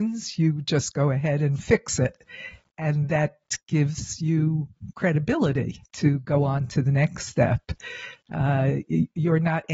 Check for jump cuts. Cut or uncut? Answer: cut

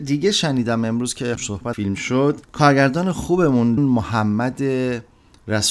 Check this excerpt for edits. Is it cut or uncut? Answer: cut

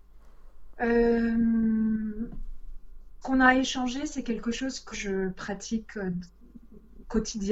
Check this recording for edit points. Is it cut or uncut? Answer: cut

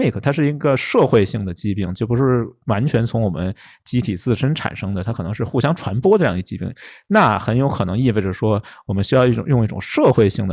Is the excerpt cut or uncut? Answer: uncut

